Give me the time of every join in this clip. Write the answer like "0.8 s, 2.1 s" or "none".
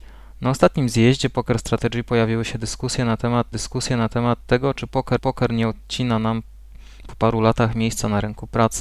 3.5 s, 5.2 s